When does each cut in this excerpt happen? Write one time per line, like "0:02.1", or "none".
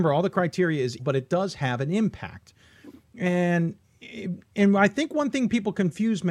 0:01.0